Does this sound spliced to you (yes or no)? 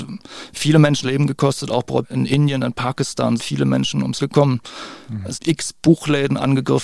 yes